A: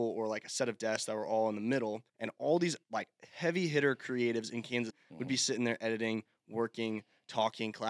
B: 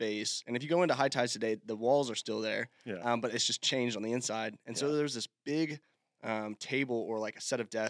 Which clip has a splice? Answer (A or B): A